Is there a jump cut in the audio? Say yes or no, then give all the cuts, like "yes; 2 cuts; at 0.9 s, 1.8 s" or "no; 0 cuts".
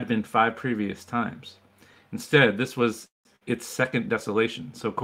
no; 0 cuts